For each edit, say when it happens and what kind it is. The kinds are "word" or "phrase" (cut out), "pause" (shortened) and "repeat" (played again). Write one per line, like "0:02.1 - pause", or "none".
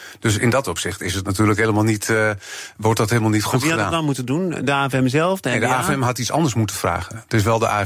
none